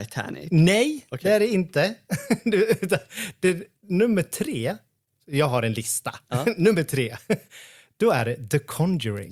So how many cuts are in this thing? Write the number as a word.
one